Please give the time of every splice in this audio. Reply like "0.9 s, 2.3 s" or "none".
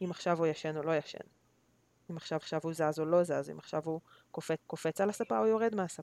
2.4 s, 4.6 s